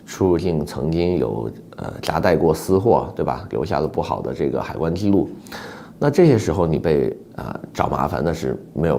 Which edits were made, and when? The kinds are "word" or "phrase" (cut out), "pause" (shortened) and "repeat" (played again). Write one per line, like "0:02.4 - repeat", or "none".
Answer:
0:07.3 - pause